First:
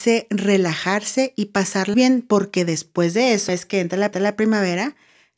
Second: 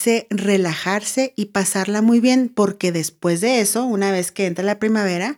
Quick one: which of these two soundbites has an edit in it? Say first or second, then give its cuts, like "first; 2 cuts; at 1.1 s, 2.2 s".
first; 3 cuts; at 1.9 s, 3.5 s, 4.1 s